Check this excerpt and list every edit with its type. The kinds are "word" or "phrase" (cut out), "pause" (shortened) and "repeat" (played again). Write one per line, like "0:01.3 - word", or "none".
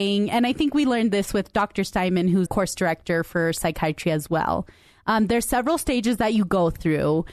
0:02.5 - word